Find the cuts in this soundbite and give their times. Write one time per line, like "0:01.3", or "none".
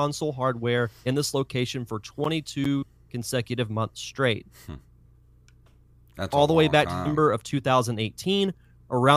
0:01.0